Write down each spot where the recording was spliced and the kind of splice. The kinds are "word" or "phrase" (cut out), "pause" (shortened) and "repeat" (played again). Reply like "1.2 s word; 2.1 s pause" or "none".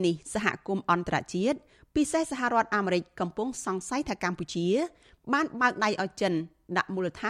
none